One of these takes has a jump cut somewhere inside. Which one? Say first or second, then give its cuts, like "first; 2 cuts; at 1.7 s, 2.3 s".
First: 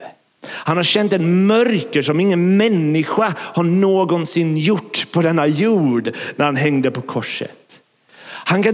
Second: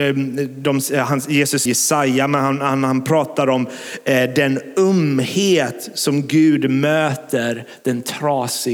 second; 1 cut; at 1.7 s